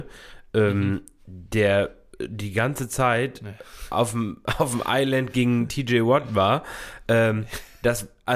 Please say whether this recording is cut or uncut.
uncut